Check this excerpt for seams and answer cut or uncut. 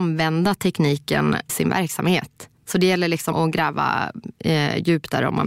cut